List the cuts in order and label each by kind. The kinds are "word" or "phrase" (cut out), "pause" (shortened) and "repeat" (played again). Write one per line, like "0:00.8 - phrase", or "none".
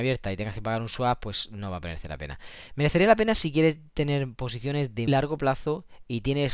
0:05.1 - word